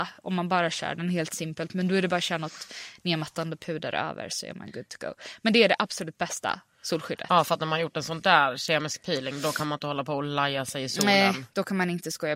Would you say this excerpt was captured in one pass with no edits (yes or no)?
yes